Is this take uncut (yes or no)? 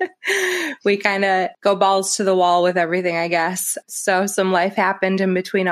yes